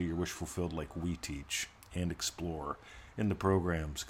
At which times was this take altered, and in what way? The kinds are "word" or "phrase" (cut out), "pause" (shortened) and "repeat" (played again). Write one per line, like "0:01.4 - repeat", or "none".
none